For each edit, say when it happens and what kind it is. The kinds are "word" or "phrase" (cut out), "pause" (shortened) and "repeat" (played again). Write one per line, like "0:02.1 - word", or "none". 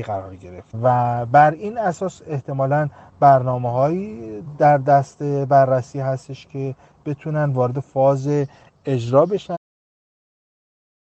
none

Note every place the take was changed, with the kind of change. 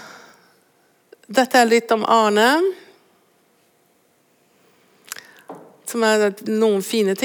none

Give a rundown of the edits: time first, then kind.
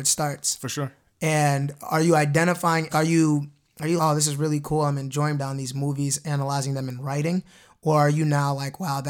0:02.9 - word
0:04.0 - word
0:05.4 - word

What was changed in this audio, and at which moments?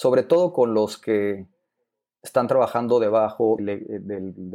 0:03.6 - word

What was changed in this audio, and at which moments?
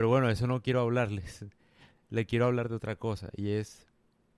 none

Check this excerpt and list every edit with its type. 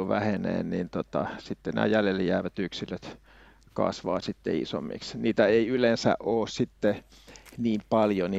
none

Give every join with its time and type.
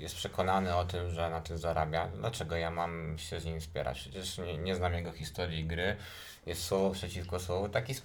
none

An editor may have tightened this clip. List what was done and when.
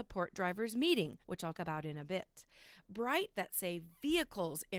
0:01.2 - pause
0:01.5 - word
0:03.3 - word

